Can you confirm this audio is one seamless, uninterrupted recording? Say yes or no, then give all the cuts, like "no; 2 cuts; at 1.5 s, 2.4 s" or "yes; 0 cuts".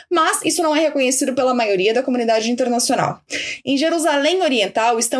yes; 0 cuts